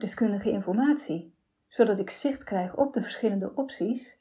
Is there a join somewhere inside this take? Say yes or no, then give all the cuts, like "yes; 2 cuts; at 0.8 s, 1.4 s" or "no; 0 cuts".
no; 0 cuts